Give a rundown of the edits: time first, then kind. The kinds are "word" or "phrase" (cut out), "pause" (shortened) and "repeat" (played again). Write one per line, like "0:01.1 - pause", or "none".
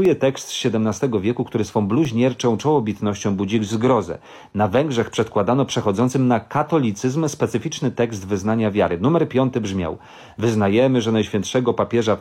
none